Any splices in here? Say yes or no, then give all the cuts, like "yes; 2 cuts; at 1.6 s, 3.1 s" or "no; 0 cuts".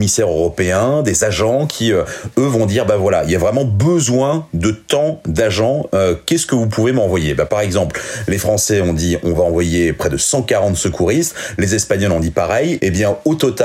no; 0 cuts